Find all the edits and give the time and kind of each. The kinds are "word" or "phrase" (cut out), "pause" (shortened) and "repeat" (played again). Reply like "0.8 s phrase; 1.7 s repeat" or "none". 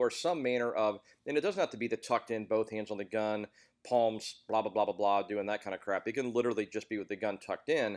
none

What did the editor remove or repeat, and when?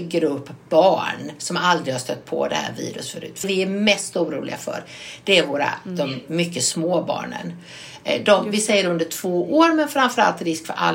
3.4 s word

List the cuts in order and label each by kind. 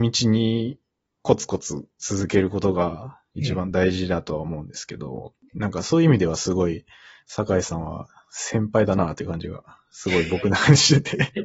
none

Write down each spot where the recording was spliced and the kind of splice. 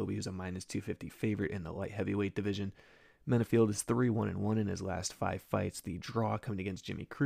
none

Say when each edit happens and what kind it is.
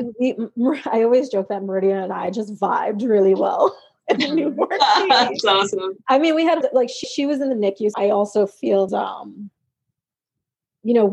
6.6 s word; 7.0 s repeat; 7.9 s word; 8.9 s phrase

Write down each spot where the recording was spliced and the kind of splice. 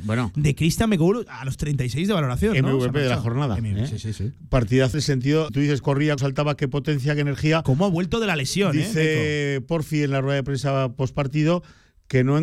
4.9 s word; 5.5 s word; 5.8 s word; 6.2 s word

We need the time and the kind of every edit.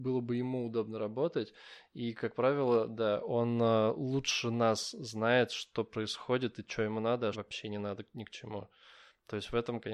7.3 s word

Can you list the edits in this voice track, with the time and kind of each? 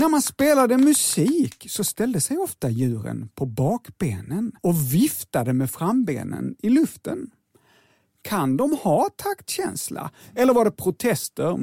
4.6 s pause

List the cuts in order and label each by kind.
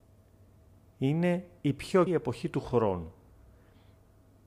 2.1 s word

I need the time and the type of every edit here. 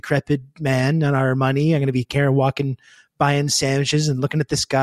none

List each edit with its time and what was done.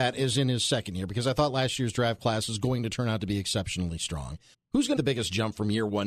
4.5 s pause; 5.0 s phrase

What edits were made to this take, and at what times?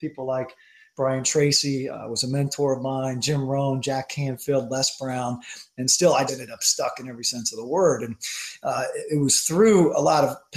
6.3 s word

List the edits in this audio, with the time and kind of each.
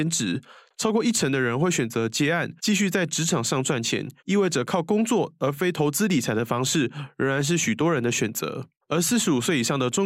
2.6 s pause; 4.2 s pause; 8.8 s pause

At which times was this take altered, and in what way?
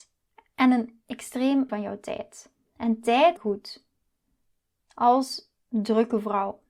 1.7 s word; 2.7 s pause; 3.4 s phrase

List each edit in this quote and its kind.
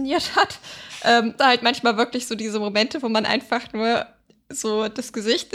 1.4 s word

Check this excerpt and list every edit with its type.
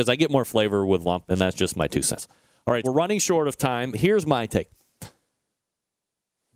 1.3 s word; 2.8 s word; 3.9 s word

